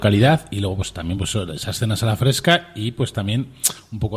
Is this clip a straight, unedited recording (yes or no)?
yes